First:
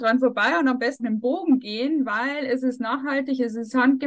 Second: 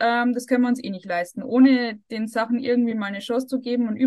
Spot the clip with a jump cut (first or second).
first